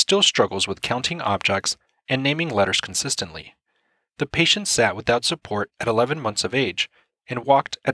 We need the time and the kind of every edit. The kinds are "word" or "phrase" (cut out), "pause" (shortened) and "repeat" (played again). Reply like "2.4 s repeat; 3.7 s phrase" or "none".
none

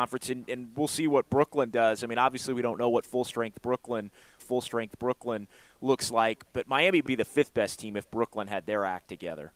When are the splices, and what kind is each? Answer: 4.4 s repeat; 6.5 s word; 7.1 s word

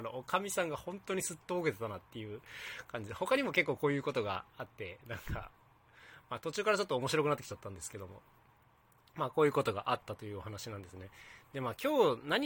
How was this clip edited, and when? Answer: none

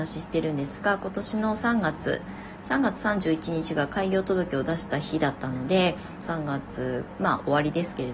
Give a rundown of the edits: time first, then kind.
6.2 s phrase

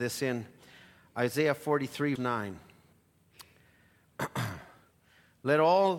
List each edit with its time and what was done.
2.2 s word

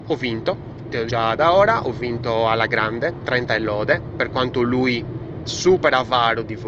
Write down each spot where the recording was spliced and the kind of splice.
1.1 s word; 5.5 s word

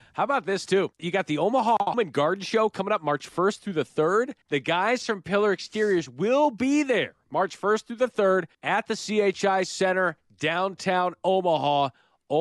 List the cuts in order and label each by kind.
0.9 s pause; 1.9 s word; 4.4 s pause; 8.5 s pause

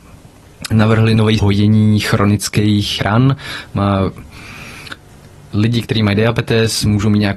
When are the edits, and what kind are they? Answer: 1.4 s phrase; 3.0 s word

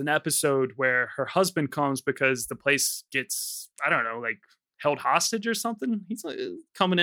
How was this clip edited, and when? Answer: none

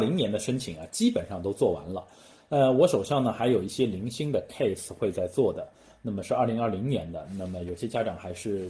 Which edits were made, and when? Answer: none

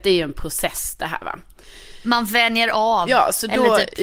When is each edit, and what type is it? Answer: none

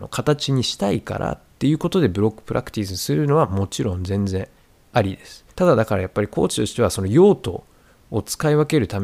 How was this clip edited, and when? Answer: 4.6 s pause; 5.5 s pause

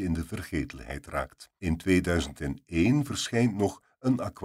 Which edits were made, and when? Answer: 1.6 s pause

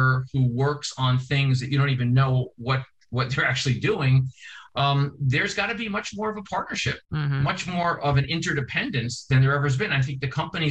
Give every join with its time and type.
7.0 s pause

